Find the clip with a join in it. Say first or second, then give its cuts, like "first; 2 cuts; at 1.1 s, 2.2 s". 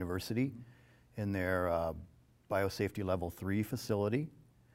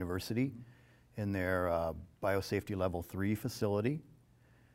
second; 1 cut; at 2.1 s